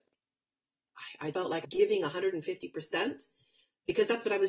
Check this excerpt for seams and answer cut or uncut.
cut